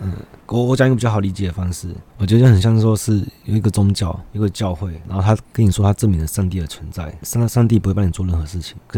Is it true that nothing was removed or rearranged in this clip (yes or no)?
no